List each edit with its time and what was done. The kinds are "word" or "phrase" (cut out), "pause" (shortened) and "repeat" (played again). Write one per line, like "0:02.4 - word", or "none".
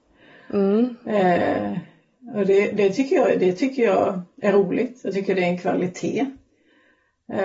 none